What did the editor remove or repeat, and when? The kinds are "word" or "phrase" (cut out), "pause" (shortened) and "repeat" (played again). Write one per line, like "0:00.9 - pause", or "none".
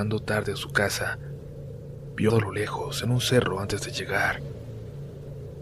0:02.3 - phrase